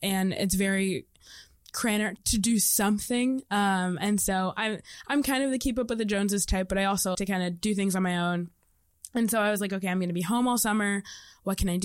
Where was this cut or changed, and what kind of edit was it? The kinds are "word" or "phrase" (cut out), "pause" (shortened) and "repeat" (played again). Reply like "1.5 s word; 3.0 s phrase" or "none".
2.2 s word; 7.1 s word